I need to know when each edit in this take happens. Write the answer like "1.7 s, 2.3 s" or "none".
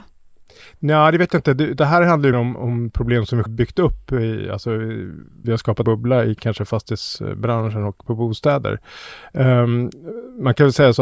2.3 s, 3.5 s, 5.4 s, 5.8 s, 8.0 s